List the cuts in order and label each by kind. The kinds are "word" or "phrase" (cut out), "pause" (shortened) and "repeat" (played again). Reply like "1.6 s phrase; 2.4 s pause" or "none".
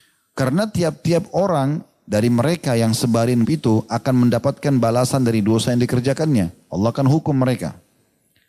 3.4 s word